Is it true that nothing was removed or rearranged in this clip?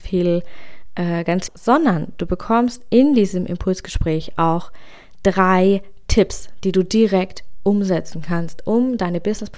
no; 1 cut; at 1.5 s

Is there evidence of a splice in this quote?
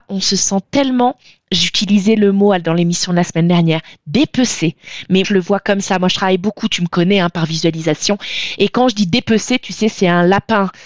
yes; 1 cut; at 5.2 s

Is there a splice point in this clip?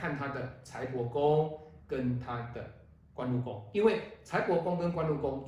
no; 0 cuts

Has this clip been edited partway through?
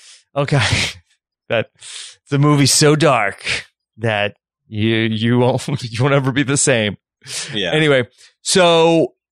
no; 0 cuts

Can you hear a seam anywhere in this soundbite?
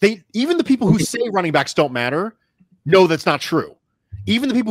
no; 0 cuts

